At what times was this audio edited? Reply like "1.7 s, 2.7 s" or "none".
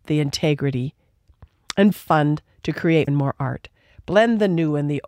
1.9 s, 3.1 s